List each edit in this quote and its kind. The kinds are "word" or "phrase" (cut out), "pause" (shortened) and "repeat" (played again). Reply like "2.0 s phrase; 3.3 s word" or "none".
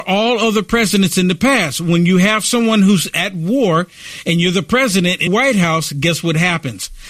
5.3 s word